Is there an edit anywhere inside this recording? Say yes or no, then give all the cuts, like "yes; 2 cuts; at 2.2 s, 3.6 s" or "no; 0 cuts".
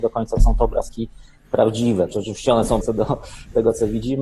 yes; 2 cuts; at 2.1 s, 2.8 s